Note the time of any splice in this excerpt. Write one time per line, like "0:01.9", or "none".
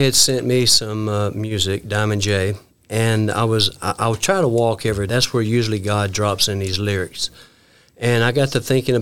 0:05.1